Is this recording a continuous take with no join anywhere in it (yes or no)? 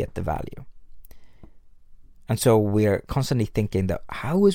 yes